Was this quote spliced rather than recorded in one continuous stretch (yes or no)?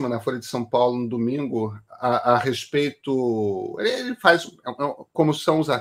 no